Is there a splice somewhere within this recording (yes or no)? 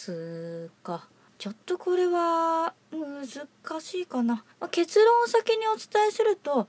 yes